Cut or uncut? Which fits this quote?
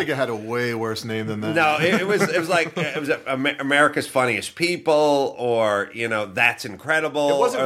uncut